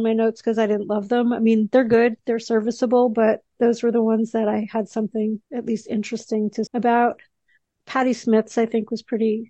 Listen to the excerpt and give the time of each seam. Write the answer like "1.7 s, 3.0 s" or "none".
5.5 s, 6.7 s